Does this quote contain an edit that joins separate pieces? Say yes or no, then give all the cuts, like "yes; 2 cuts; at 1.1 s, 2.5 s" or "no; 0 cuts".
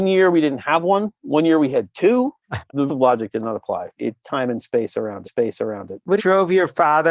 yes; 5 cuts; at 2.4 s, 2.9 s, 4.2 s, 5.2 s, 6.2 s